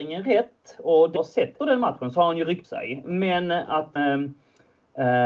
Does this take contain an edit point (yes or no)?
yes